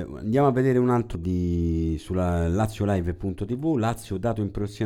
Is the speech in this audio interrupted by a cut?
yes; 1 cut; at 1.1 s

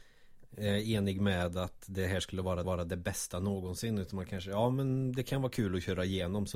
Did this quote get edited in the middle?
yes; 1 cut; at 2.6 s

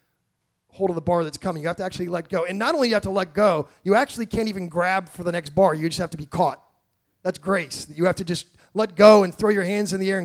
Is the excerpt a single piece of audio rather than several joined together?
yes; 0 cuts

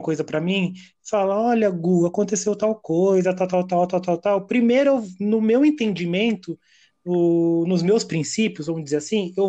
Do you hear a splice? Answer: no; 0 cuts

